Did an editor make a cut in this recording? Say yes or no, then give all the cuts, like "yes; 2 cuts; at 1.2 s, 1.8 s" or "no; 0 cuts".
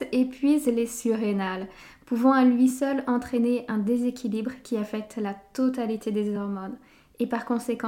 no; 0 cuts